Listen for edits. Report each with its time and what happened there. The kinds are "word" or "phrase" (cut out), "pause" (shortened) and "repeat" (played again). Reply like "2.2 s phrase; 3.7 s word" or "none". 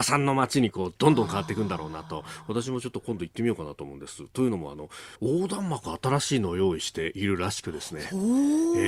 5.1 s pause